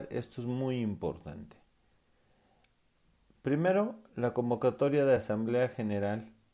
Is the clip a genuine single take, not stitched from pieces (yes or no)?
yes